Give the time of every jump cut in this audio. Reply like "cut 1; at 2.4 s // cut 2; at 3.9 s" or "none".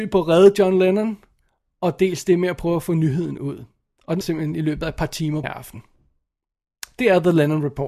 cut 1; at 4.2 s // cut 2; at 5.4 s